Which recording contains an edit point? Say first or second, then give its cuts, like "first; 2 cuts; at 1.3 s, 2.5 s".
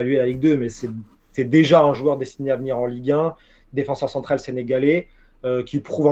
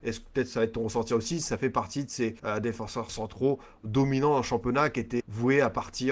second; 3 cuts; at 2.4 s, 3.1 s, 5.2 s